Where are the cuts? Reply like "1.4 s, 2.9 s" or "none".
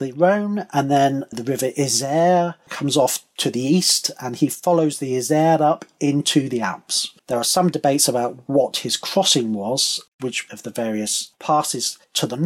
7.2 s, 10.1 s

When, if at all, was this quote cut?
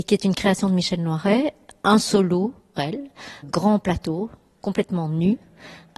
2.8 s, 3.4 s

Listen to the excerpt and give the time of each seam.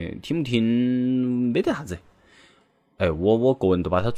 none

